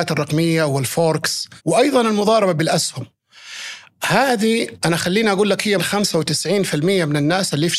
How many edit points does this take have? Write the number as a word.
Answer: two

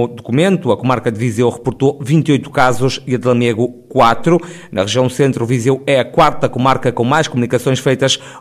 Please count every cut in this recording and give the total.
zero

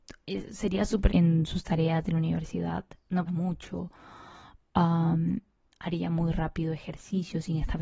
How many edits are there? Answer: two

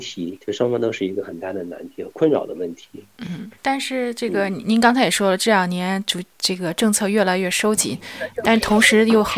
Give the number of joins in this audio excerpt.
one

